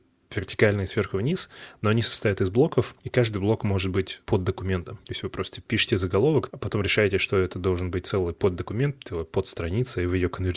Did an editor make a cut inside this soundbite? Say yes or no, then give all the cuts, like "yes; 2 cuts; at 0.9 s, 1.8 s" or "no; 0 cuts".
no; 0 cuts